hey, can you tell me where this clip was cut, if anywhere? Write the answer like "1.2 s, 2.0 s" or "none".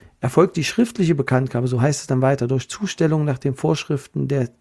none